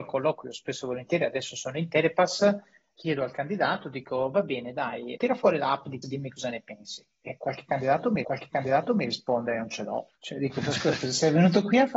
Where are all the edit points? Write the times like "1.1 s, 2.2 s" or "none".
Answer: 3.0 s, 5.2 s, 6.0 s, 8.2 s, 10.2 s